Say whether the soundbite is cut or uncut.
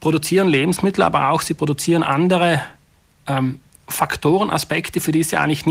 cut